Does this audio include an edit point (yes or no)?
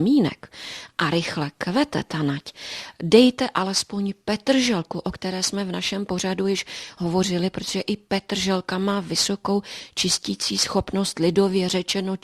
no